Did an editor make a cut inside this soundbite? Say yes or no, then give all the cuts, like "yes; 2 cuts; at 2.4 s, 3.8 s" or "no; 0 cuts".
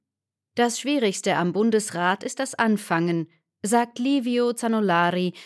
no; 0 cuts